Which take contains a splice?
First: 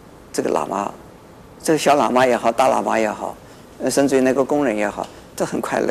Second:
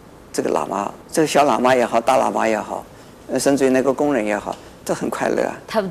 second; 1 cut; at 1.0 s

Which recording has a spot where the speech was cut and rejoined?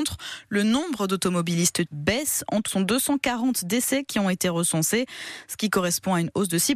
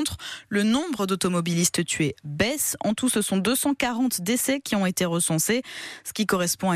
first; 2 cuts; at 1.9 s, 2.7 s

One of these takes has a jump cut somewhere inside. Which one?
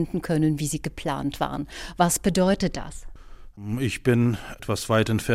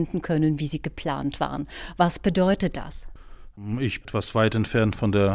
second; 1 cut; at 4.0 s

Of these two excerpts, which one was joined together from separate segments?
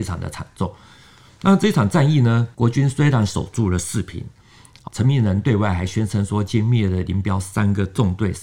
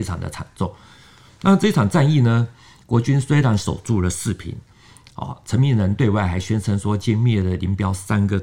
first; 2 cuts; at 2.5 s, 4.9 s

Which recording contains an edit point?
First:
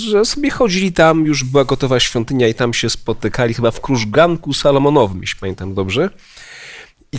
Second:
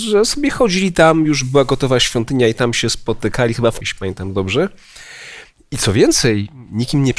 second; 1 cut; at 3.8 s

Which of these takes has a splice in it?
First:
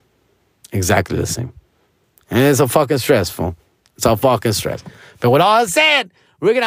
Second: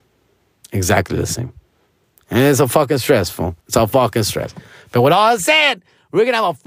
second; 1 cut; at 3.6 s

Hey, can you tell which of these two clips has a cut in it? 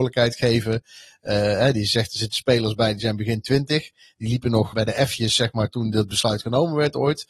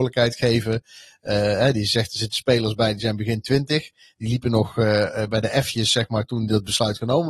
first; 1 cut; at 4.7 s

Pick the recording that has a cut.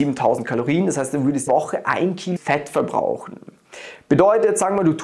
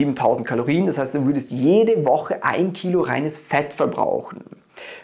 first; 2 cuts; at 1.5 s, 2.4 s

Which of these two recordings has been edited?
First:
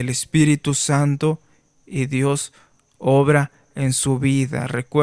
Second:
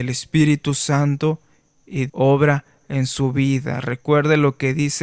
second; 1 cut; at 2.1 s

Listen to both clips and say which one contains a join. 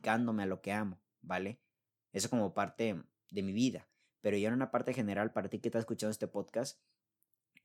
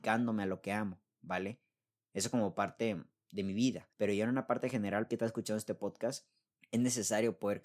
second; 3 cuts; at 3.9 s, 5.1 s, 6.5 s

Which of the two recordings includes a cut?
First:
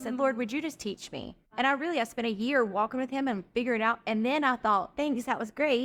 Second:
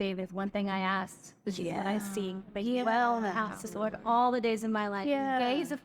first; 1 cut; at 1.5 s

